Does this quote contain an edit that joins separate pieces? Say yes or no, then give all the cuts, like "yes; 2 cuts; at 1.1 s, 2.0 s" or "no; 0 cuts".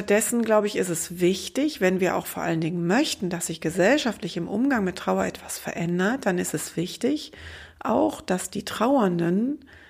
no; 0 cuts